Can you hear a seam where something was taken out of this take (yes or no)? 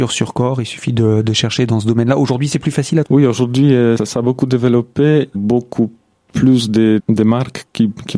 yes